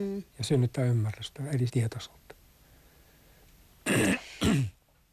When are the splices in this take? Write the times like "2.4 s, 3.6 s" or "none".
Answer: 1.7 s